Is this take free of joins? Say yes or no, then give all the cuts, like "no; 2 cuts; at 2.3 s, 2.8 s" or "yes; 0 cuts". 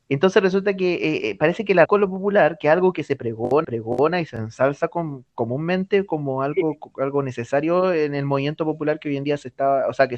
no; 3 cuts; at 1.9 s, 3.6 s, 5.3 s